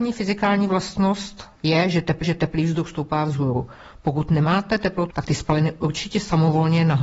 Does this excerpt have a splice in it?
yes; 3 cuts; at 1.5 s, 2.2 s, 5.1 s

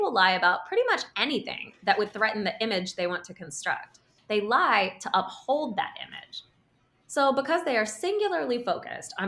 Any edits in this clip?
no; 0 cuts

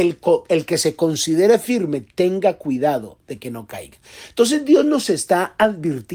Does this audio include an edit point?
no; 0 cuts

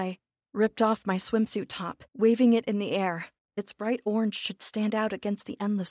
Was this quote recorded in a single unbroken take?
no; 2 cuts; at 2.1 s, 3.4 s

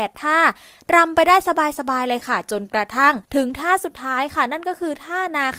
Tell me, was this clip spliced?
yes; 1 cut; at 3.2 s

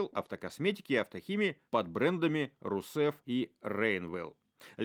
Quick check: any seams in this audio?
yes; 2 cuts; at 1.7 s, 3.2 s

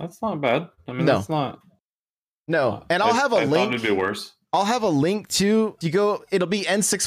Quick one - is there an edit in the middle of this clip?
yes; 1 cut; at 5.8 s

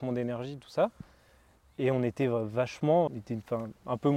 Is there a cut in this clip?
yes; 1 cut; at 3.1 s

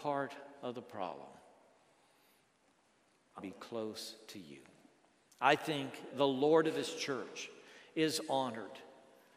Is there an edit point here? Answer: yes; 2 cuts; at 3.4 s, 6.1 s

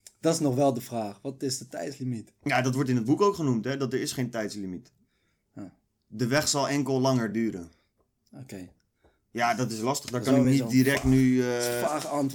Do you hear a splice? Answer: no; 0 cuts

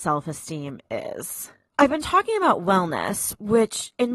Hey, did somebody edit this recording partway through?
no; 0 cuts

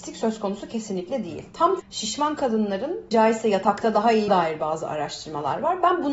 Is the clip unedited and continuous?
no; 3 cuts; at 1.8 s, 3.1 s, 4.3 s

